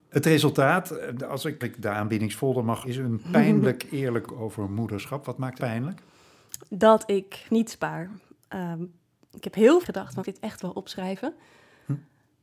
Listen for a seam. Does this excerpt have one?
yes; 7 cuts; at 1.6 s, 2.8 s, 4.3 s, 5.6 s, 7.5 s, 9.8 s, 10.2 s

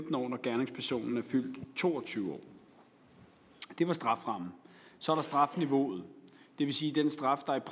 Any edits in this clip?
no; 0 cuts

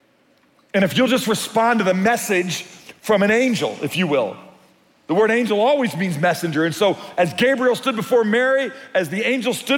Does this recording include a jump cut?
no; 0 cuts

